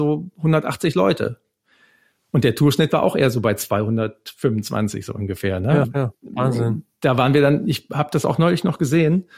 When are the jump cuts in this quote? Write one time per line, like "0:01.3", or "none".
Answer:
0:05.8